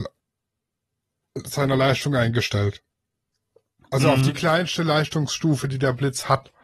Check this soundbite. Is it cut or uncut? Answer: uncut